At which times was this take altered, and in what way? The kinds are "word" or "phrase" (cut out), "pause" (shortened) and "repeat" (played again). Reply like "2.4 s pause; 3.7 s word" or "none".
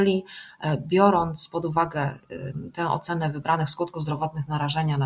none